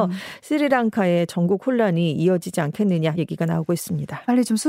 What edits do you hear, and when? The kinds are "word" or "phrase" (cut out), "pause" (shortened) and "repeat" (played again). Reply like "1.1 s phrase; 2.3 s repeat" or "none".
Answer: 3.2 s word